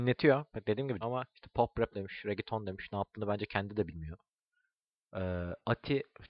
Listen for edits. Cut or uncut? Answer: cut